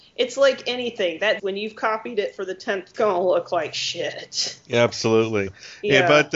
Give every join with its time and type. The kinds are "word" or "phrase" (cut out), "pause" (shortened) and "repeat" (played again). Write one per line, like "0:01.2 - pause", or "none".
0:01.4 - word
0:02.9 - phrase
0:04.6 - pause